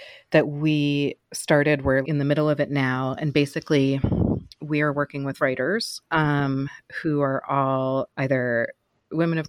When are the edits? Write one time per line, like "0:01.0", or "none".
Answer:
0:01.2
0:02.0
0:05.4
0:08.1